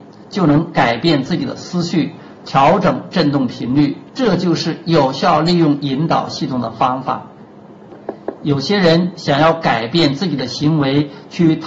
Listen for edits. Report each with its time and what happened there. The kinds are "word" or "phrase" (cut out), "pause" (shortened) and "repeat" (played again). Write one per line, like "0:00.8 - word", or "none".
0:04.1 - pause

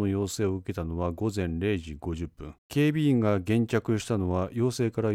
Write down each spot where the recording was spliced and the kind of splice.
0:02.6 - pause

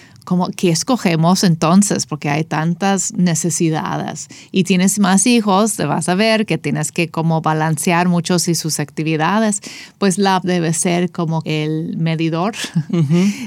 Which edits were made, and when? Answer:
0:08.4 - word
0:10.4 - word
0:11.4 - word

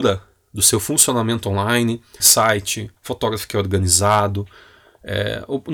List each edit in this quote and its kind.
0:02.2 - phrase
0:03.0 - pause

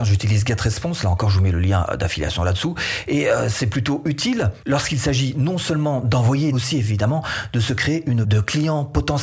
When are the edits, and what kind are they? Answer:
0:06.5 - phrase
0:08.2 - word

